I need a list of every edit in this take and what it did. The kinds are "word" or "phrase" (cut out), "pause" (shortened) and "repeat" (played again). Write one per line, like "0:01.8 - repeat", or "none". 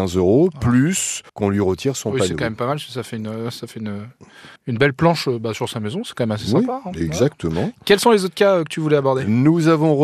0:01.3 - pause
0:04.6 - pause